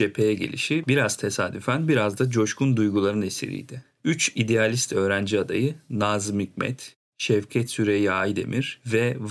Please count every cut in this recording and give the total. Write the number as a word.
zero